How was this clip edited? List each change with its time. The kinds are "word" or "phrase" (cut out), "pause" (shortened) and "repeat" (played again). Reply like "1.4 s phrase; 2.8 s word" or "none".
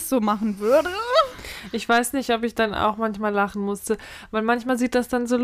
none